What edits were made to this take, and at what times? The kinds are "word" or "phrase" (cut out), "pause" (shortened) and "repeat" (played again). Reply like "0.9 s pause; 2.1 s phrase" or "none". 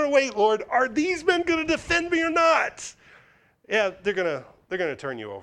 none